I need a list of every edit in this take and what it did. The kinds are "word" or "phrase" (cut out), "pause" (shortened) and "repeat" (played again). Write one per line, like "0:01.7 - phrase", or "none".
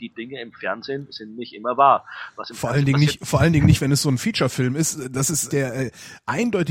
0:05.5 - word